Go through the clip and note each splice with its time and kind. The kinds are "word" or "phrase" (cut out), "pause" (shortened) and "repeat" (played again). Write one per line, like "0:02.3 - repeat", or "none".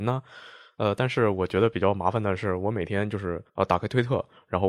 0:03.5 - pause